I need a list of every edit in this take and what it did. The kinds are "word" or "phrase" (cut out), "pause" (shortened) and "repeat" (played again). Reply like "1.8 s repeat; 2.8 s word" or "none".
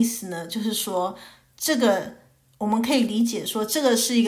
none

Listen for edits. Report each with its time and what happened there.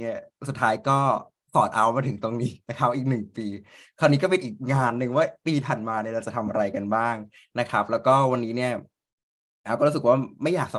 none

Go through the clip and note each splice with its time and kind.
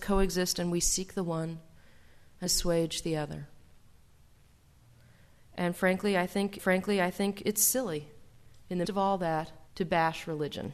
2.5 s word; 6.6 s repeat; 8.8 s word; 9.7 s pause

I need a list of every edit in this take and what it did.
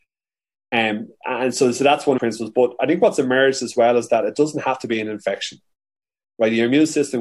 2.2 s phrase

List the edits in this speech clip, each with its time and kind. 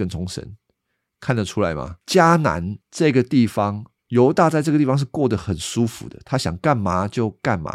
2.0 s pause; 2.8 s pause; 4.0 s pause

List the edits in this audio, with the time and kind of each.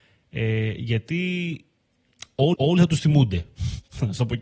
2.5 s repeat

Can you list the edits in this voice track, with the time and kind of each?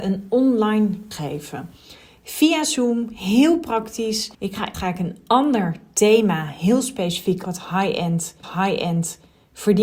1.1 s word; 4.3 s pause; 4.7 s phrase; 7.4 s word; 8.4 s repeat

